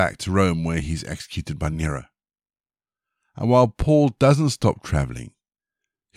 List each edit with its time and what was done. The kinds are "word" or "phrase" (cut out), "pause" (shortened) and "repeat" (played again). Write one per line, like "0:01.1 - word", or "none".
none